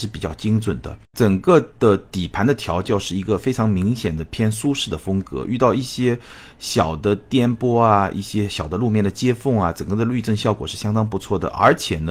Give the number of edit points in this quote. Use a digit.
1